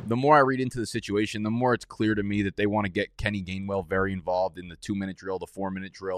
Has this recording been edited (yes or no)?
no